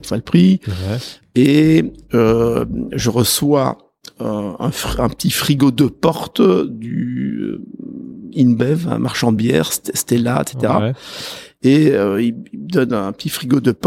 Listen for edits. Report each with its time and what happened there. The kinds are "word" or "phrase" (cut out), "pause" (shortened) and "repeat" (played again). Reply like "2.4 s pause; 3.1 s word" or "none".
none